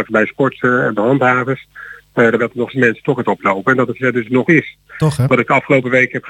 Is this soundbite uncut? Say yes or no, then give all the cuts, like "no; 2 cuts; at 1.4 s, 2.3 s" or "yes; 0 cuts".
no; 6 cuts; at 1.0 s, 2.4 s, 2.7 s, 3.2 s, 4.0 s, 4.5 s